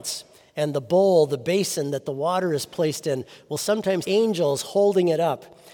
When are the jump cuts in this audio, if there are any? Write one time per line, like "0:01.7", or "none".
0:04.0